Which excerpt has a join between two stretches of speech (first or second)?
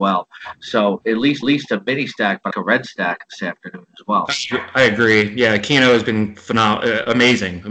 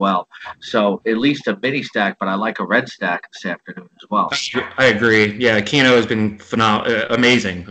first